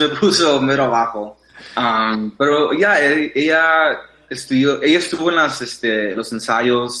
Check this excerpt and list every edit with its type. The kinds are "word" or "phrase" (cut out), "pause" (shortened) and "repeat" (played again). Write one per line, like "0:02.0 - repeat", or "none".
none